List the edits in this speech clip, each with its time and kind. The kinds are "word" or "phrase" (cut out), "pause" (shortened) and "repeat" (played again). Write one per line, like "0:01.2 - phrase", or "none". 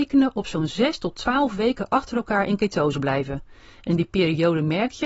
none